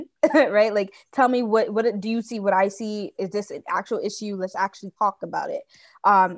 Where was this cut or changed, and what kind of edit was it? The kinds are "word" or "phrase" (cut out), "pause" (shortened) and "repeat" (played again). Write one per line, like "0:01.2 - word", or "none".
0:05.0 - pause